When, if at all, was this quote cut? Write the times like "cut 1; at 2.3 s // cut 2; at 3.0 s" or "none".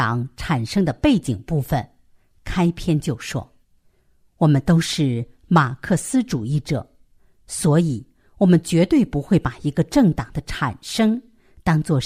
cut 1; at 3.6 s